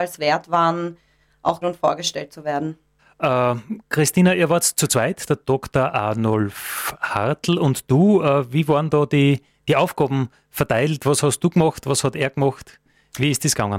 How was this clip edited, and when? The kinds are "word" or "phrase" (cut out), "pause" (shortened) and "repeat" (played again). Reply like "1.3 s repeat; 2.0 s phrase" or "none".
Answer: 1.6 s phrase; 3.0 s pause